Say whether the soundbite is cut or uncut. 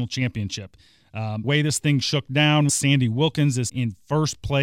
cut